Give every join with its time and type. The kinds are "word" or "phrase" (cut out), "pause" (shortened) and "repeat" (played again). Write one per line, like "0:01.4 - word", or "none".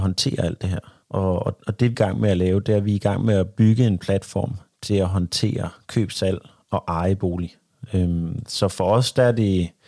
0:01.0 - pause
0:01.9 - phrase